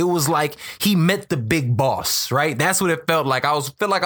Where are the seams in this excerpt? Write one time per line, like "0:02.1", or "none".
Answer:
none